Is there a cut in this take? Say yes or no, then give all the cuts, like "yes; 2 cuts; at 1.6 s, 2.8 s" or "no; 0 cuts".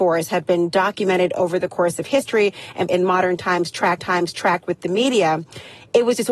yes; 2 cuts; at 2.9 s, 4.0 s